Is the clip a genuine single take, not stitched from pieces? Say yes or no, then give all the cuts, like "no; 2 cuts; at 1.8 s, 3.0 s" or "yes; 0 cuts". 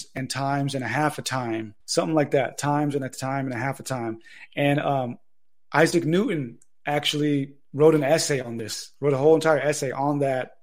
no; 1 cut; at 1.8 s